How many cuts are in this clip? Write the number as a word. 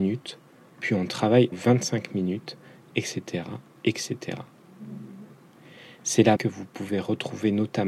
two